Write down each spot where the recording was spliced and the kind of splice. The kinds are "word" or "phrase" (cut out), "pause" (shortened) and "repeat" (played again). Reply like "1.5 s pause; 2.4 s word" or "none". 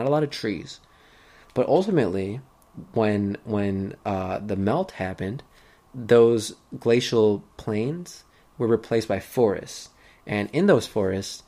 none